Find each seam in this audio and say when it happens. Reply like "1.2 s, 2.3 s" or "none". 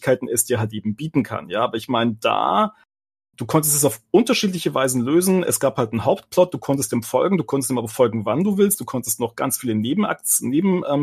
none

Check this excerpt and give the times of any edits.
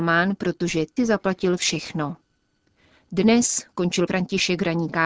1.0 s, 4.1 s

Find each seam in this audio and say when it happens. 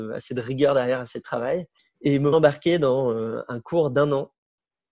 2.3 s

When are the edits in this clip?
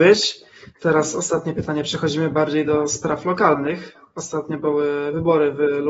none

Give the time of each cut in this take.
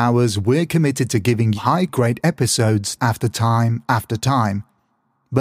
1.6 s, 1.9 s, 3.0 s

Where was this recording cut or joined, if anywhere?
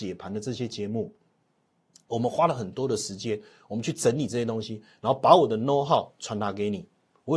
none

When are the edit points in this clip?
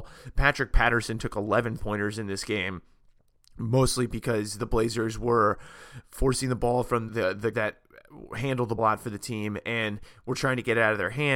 1.8 s, 7.1 s, 7.5 s, 8.8 s

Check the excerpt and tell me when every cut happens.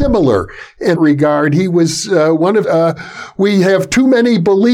0.9 s, 2.6 s

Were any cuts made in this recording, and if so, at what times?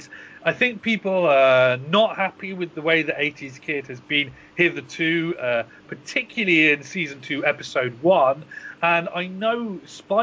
none

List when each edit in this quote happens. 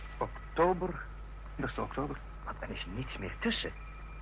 1.6 s, 2.9 s

